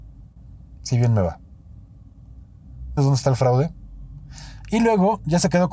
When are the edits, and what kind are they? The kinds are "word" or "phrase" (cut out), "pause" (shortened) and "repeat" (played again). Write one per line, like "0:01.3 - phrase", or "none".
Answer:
0:03.0 - word